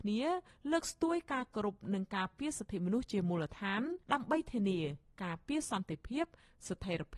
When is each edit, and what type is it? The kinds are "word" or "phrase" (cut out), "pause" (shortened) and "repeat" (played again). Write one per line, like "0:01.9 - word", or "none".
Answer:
0:04.0 - pause